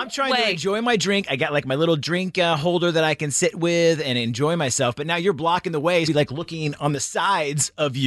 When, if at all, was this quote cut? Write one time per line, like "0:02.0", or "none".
0:06.0